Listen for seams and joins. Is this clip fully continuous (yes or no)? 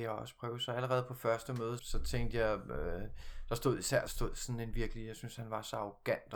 no